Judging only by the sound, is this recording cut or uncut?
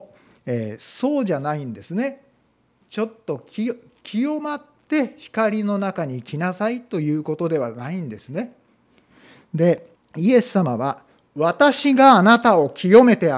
cut